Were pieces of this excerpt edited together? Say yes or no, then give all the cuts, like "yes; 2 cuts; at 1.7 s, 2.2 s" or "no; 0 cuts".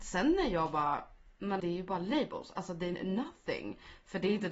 yes; 2 cuts; at 1.6 s, 2.9 s